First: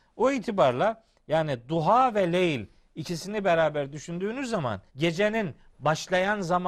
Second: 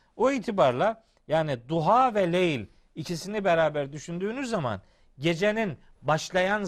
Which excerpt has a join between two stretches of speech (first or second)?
first